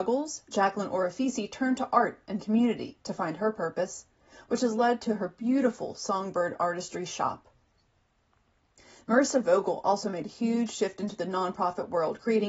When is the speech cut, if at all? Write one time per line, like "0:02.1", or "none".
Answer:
none